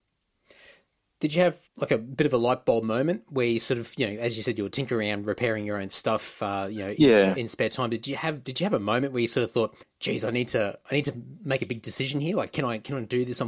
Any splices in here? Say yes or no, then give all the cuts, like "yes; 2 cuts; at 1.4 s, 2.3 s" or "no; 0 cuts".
yes; 2 cuts; at 1.7 s, 9.8 s